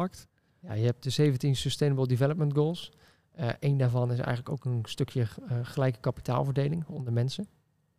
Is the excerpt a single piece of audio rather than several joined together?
yes; 0 cuts

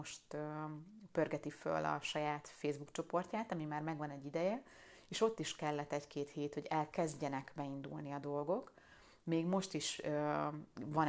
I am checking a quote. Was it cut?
no; 0 cuts

